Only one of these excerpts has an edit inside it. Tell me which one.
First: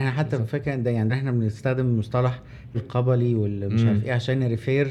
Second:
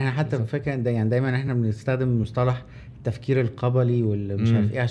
first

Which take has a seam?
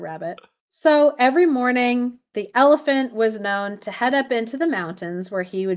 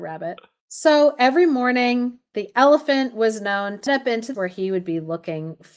second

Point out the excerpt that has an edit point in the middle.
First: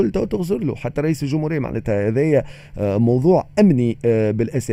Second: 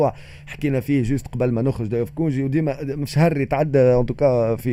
second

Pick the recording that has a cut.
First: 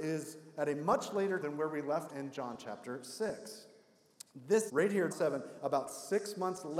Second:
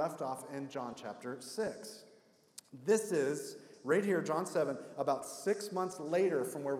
first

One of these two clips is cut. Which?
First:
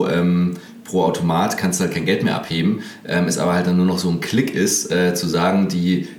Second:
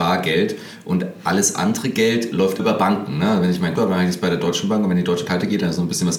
second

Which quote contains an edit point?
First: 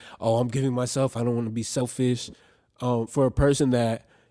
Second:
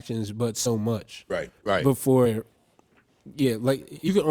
second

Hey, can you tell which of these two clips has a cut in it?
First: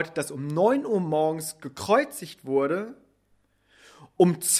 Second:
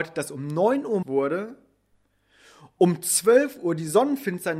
second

